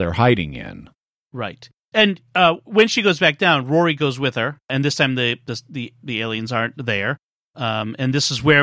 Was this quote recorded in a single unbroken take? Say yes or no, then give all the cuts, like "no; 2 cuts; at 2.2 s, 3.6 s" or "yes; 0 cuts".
yes; 0 cuts